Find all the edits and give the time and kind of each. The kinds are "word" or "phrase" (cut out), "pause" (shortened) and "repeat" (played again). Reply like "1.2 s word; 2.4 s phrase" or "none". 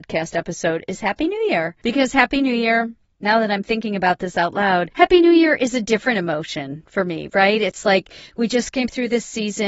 none